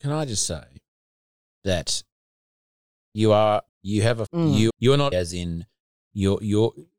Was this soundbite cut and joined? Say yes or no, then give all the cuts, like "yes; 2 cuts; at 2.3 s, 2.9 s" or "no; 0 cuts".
yes; 4 cuts; at 3.7 s, 4.3 s, 4.7 s, 5.1 s